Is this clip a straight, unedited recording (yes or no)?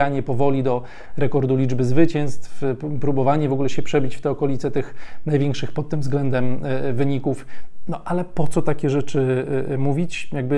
yes